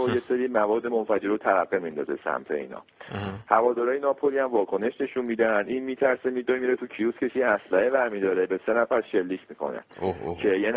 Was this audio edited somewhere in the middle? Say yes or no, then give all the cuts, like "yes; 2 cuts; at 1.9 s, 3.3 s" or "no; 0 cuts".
no; 0 cuts